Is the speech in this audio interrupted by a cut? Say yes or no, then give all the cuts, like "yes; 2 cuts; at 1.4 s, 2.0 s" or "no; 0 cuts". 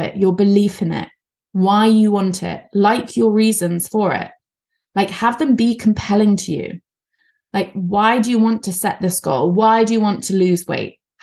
no; 0 cuts